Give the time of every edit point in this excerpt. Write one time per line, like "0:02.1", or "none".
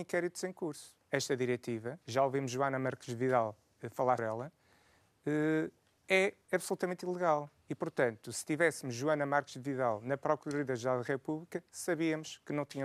0:01.0
0:02.0
0:04.2